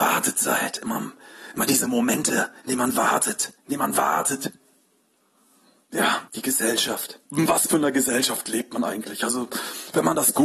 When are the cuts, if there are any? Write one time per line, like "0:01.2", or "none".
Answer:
0:03.6
0:06.3
0:07.3